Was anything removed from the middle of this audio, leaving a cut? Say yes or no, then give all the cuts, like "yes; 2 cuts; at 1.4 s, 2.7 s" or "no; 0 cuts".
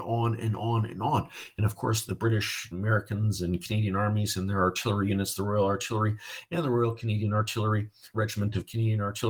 yes; 3 cuts; at 2.1 s, 2.7 s, 8.1 s